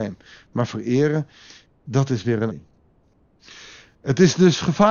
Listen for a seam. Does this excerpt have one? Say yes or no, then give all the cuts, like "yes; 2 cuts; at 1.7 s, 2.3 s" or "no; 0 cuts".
yes; 1 cut; at 2.5 s